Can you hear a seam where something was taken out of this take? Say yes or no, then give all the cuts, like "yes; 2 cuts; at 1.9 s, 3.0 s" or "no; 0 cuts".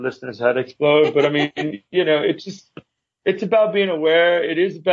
no; 0 cuts